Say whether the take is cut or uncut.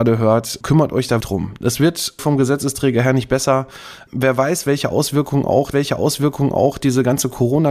cut